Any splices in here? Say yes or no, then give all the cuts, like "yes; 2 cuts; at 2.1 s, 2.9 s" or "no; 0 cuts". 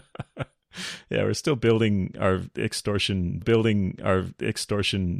yes; 1 cut; at 3.4 s